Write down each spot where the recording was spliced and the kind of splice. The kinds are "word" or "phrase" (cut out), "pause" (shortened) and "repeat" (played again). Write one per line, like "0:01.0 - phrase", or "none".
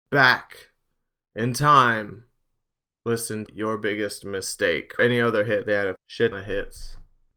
0:03.5 - word
0:05.0 - word
0:06.0 - word
0:06.3 - word